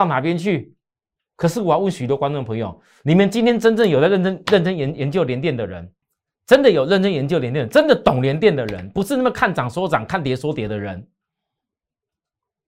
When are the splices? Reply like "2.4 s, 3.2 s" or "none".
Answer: 6.0 s